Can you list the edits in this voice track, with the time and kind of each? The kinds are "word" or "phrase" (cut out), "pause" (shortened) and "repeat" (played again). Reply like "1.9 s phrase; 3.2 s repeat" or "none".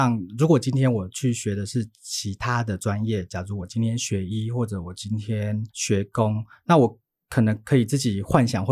5.7 s pause